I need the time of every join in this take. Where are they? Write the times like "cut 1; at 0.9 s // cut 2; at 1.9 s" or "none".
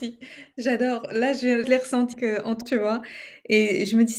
cut 1; at 1.6 s // cut 2; at 2.1 s // cut 3; at 2.6 s

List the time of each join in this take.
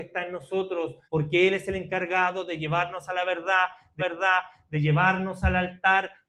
cut 1; at 1.0 s // cut 2; at 4.0 s

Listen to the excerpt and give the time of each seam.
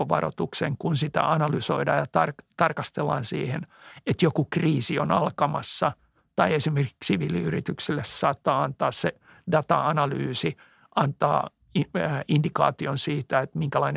none

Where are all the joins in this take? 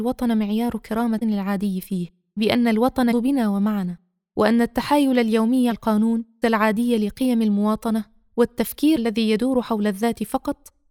cut 1; at 1.2 s // cut 2; at 2.4 s // cut 3; at 3.1 s // cut 4; at 5.7 s // cut 5; at 6.4 s // cut 6; at 9.0 s

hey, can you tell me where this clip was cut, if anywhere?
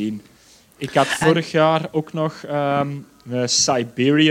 none

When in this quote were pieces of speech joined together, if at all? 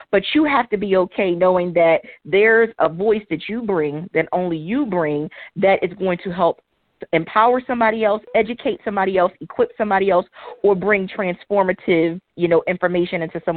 none

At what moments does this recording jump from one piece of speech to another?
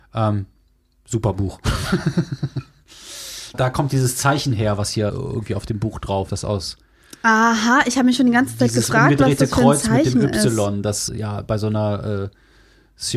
cut 1; at 3.5 s // cut 2; at 5.1 s // cut 3; at 6.3 s // cut 4; at 11.1 s

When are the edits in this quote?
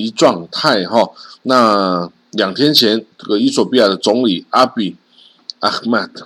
cut 1; at 1.4 s // cut 2; at 3.1 s

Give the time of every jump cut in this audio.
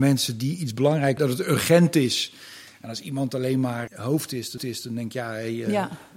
cut 1; at 1.2 s // cut 2; at 3.9 s // cut 3; at 4.6 s

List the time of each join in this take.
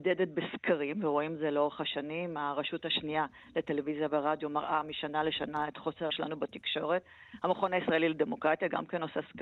cut 1; at 6.1 s

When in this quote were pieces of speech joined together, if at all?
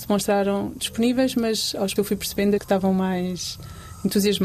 cut 1; at 2.0 s // cut 2; at 2.6 s

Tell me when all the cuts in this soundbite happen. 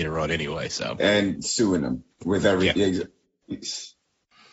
cut 1; at 1.0 s // cut 2; at 2.1 s

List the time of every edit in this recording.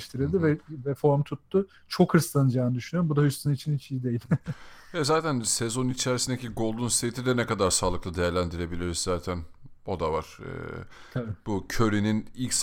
none

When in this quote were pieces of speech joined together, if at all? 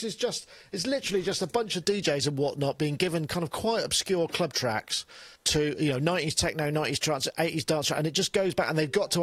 cut 1; at 5.4 s

